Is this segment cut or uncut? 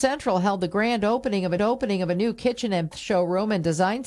cut